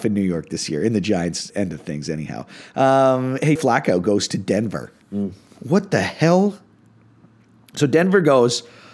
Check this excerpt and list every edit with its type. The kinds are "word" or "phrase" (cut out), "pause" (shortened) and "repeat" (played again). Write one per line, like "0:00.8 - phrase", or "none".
0:01.5 - word
0:03.6 - word
0:05.0 - pause